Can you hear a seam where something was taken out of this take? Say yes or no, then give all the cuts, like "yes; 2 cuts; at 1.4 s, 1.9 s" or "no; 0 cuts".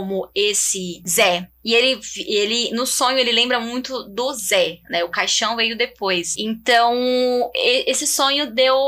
no; 0 cuts